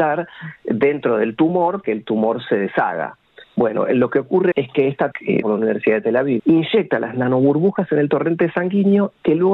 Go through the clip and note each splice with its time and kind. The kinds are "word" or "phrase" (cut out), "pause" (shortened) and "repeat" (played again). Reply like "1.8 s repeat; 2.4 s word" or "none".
1.8 s word; 4.5 s word; 5.1 s word; 5.4 s word; 6.4 s word